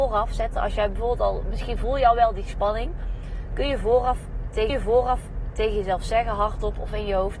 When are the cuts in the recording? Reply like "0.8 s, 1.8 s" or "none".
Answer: 4.7 s

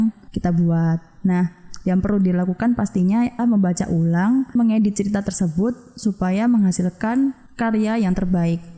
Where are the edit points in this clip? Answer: 3.4 s, 4.6 s

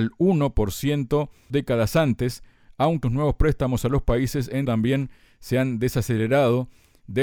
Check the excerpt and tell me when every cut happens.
1.5 s, 3.0 s, 4.6 s

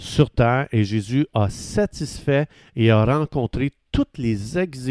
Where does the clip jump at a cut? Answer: none

